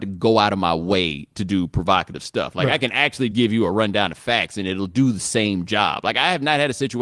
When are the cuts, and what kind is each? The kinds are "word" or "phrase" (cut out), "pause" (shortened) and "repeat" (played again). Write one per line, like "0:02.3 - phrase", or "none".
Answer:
0:03.3 - word